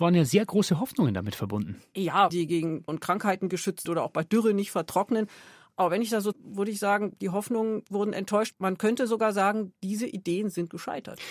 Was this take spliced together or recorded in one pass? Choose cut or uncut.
cut